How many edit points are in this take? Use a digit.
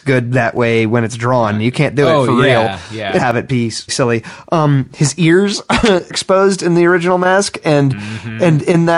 3